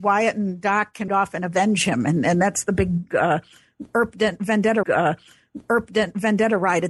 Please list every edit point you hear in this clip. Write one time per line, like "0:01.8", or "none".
0:01.1
0:04.8